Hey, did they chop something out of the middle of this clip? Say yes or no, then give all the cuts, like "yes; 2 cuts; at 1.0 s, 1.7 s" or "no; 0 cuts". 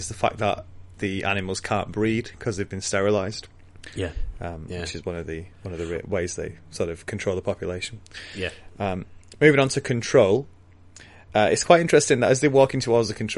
yes; 1 cut; at 5.5 s